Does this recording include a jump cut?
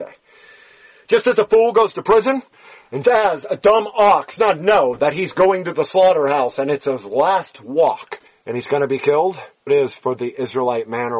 yes; 4 cuts; at 3.0 s, 4.4 s, 8.3 s, 9.7 s

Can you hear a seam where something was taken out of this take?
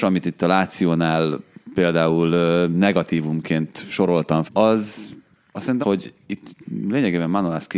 yes; 2 cuts; at 4.5 s, 5.8 s

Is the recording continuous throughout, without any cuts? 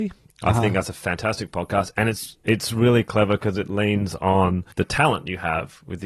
no; 1 cut; at 4.7 s

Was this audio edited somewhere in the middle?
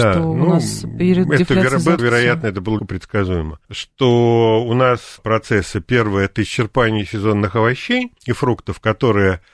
yes; 5 cuts; at 2.0 s, 2.8 s, 3.6 s, 5.2 s, 8.2 s

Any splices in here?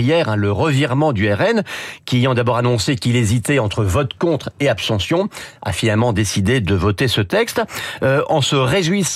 no; 0 cuts

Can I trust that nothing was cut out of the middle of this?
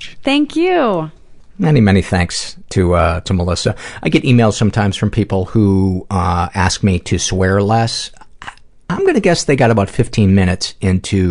yes; 0 cuts

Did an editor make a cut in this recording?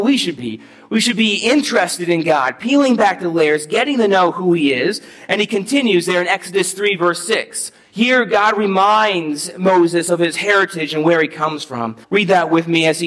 yes; 1 cut; at 12.0 s

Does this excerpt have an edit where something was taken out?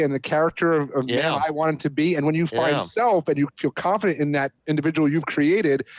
yes; 1 cut; at 4.6 s

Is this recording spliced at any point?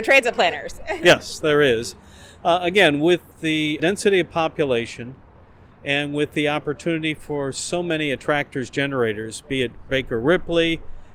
no; 0 cuts

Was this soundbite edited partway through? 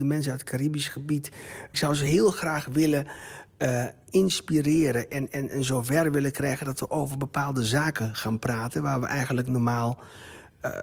no; 0 cuts

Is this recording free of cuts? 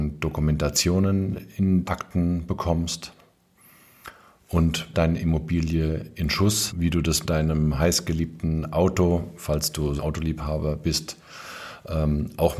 no; 5 cuts; at 1.8 s, 4.9 s, 6.7 s, 7.2 s, 10.0 s

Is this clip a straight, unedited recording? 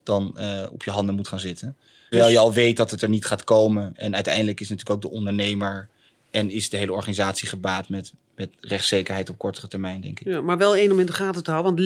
yes; 0 cuts

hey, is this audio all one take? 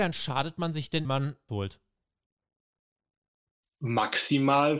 no; 2 cuts; at 1.0 s, 1.5 s

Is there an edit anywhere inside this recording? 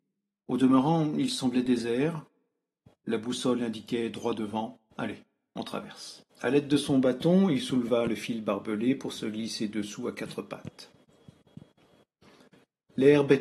yes; 1 cut; at 6.3 s

